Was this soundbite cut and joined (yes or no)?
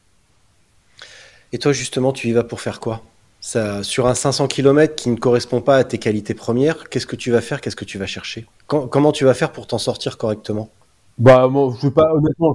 yes